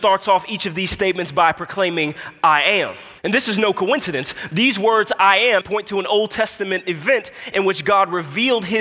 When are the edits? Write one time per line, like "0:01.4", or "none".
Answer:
0:03.2
0:05.6